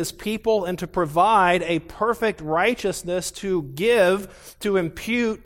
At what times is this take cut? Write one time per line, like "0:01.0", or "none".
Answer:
none